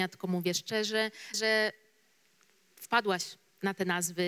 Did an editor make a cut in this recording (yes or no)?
yes